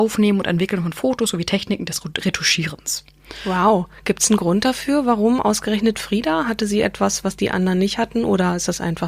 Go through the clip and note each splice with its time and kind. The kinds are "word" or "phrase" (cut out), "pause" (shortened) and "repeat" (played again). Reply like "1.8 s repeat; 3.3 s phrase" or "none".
none